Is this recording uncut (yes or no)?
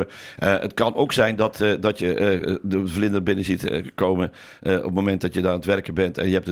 yes